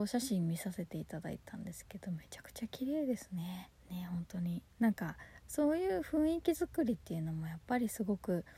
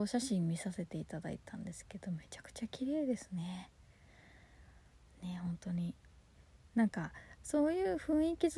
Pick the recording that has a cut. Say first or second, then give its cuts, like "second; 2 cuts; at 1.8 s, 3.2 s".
first; 2 cuts; at 3.8 s, 4.7 s